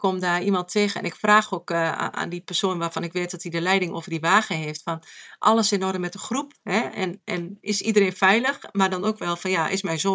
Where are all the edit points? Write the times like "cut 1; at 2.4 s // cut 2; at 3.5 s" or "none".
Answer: none